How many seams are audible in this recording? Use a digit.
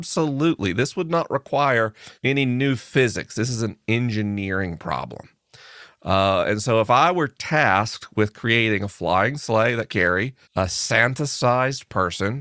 3